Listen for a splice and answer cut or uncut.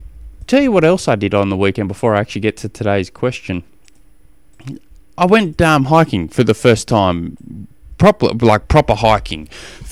uncut